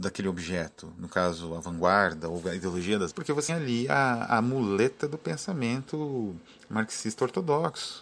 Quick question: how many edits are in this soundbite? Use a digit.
2